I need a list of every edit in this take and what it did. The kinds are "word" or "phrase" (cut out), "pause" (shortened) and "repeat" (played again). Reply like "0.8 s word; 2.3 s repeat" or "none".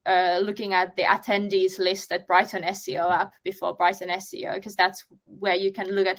none